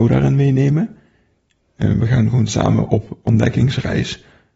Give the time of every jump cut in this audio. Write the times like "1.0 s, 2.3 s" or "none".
none